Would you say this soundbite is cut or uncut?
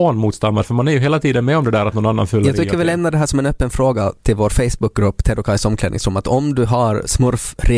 uncut